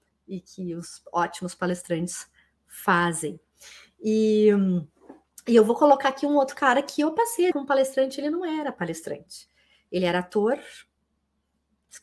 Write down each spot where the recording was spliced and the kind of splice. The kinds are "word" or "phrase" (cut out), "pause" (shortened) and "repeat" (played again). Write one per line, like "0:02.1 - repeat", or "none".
0:07.5 - word